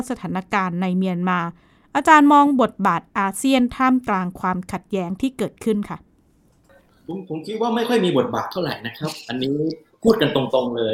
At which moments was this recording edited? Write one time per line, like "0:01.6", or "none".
none